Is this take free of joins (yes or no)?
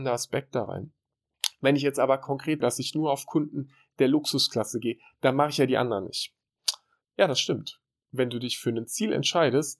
no